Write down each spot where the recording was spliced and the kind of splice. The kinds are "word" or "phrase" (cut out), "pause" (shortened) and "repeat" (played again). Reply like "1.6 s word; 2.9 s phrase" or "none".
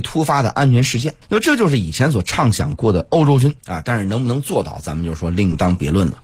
1.2 s pause; 3.6 s pause